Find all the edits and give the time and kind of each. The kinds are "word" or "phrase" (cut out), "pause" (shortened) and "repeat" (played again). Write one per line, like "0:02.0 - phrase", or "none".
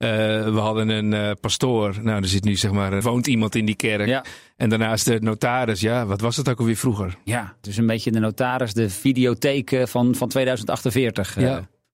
0:03.0 - word